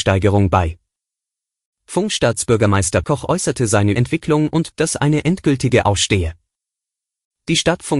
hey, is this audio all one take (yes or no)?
no